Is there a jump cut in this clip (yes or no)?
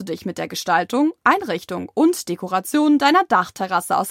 no